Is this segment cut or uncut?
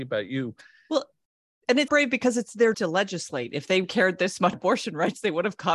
cut